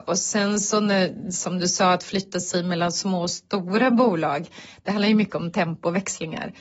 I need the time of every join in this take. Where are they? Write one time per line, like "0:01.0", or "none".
none